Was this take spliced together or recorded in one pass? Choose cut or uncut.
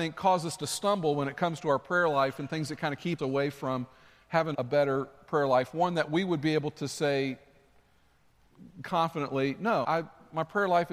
cut